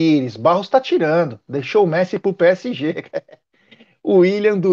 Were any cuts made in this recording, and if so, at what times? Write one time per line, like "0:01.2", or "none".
none